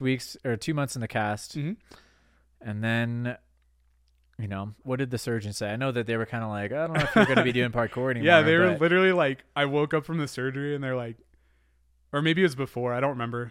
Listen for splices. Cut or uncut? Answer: cut